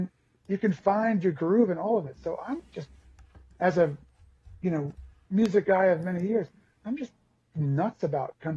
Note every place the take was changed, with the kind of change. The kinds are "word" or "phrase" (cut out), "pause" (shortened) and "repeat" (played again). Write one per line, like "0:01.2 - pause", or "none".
none